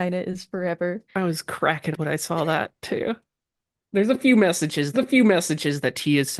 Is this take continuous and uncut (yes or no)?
no